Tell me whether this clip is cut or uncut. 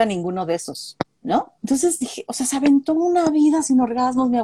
cut